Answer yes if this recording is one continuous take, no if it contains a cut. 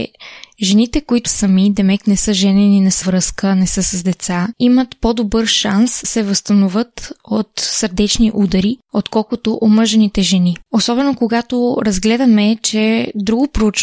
no